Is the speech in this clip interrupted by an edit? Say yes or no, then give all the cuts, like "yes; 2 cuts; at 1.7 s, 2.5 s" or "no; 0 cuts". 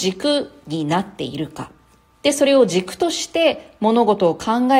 no; 0 cuts